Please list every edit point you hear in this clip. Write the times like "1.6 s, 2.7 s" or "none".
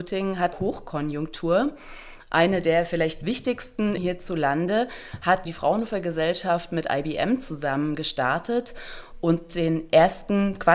4.0 s